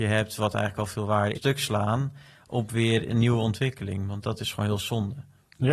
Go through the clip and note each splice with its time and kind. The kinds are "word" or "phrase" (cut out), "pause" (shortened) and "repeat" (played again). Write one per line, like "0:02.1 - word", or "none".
0:01.4 - word

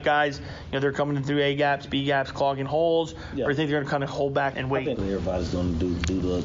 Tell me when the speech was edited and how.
0:04.5 - word
0:05.0 - word

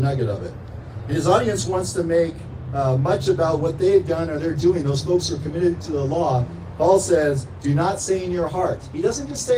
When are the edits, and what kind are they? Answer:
none

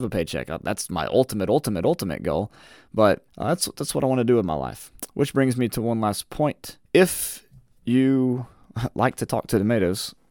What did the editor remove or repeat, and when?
0:03.3 - pause
0:06.8 - pause

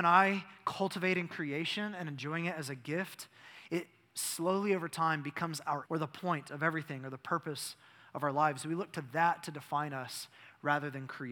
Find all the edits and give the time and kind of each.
0:05.9 - word

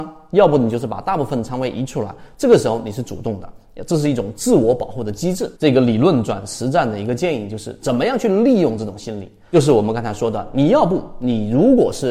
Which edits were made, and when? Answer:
0:05.6 - pause

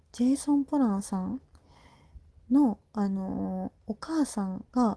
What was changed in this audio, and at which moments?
0:03.8 - pause

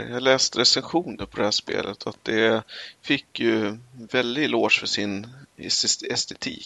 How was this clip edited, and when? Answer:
none

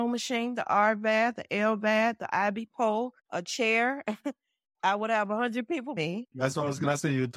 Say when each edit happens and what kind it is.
0:03.2 - pause
0:06.0 - word

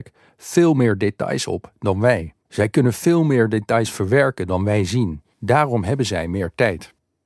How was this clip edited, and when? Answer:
0:02.4 - pause
0:05.3 - pause

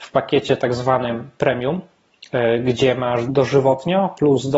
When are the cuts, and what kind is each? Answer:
0:03.3 - phrase

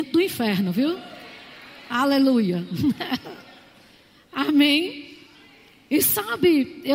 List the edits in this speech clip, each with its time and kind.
none

